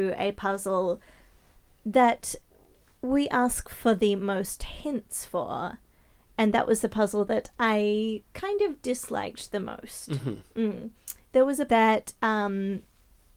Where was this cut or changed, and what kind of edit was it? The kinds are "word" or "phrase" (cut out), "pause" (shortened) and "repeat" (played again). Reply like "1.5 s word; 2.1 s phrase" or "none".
11.7 s word